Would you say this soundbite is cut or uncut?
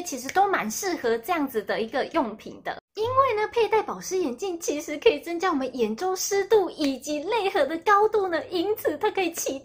cut